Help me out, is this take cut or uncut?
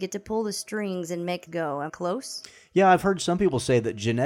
cut